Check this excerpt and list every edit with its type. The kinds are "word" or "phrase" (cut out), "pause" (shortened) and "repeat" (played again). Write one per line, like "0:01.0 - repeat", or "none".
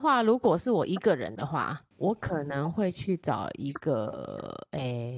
0:01.9 - pause